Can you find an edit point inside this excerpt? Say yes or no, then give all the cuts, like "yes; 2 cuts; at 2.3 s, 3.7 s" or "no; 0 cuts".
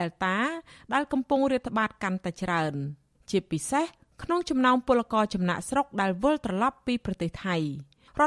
no; 0 cuts